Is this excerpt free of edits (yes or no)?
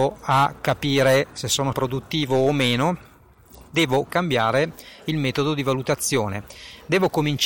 no